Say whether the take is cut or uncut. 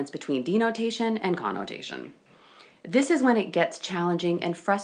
uncut